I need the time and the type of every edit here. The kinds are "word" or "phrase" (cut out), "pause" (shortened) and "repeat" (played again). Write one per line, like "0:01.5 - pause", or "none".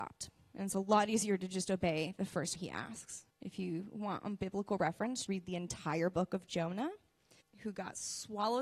0:02.5 - word
0:03.3 - pause
0:05.3 - word
0:07.4 - word